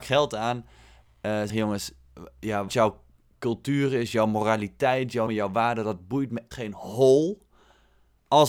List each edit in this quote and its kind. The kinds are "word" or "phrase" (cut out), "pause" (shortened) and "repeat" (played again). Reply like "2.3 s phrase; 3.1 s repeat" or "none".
1.5 s word; 2.7 s word; 5.3 s word; 6.5 s word